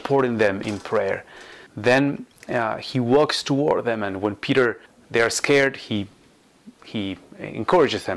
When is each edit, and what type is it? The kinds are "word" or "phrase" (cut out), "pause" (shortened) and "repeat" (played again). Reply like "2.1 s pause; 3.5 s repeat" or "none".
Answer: 1.7 s pause; 4.9 s pause